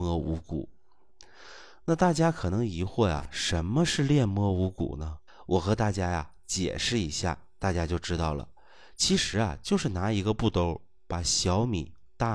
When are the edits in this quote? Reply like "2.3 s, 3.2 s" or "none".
5.3 s